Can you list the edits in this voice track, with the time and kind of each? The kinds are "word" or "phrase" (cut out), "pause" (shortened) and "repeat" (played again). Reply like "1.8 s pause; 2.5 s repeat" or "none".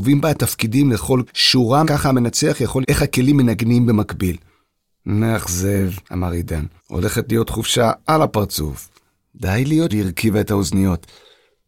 1.3 s word; 1.8 s phrase; 2.8 s word; 6.0 s pause; 6.8 s pause; 9.9 s phrase